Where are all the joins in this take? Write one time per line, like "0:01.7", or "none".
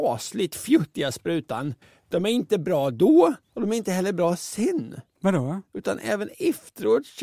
0:01.8
0:03.4